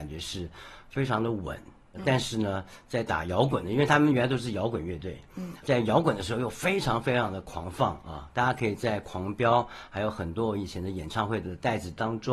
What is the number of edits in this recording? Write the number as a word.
one